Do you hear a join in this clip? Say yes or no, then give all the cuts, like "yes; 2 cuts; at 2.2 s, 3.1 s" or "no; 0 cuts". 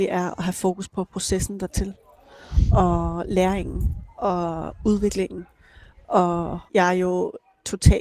yes; 1 cut; at 6.7 s